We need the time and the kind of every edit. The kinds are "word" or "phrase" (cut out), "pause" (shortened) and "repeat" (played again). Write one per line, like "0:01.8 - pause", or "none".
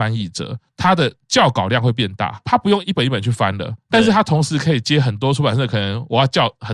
none